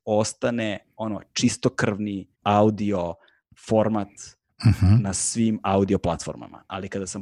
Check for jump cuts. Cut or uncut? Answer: cut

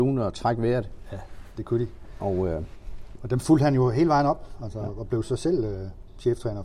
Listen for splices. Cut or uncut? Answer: uncut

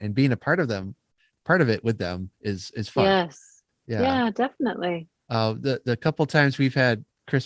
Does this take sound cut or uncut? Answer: uncut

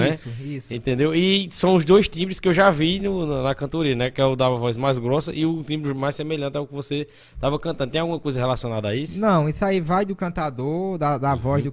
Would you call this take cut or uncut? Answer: uncut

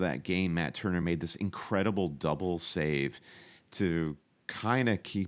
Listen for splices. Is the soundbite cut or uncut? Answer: uncut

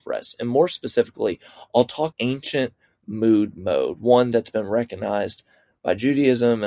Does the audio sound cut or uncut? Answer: cut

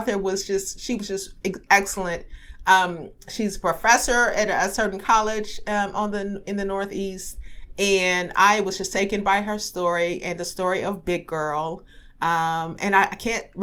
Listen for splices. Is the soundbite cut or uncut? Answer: uncut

